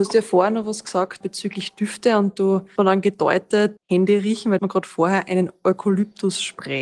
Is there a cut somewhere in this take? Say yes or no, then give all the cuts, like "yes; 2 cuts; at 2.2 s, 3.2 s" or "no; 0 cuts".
yes; 4 cuts; at 1.2 s, 2.8 s, 3.8 s, 4.6 s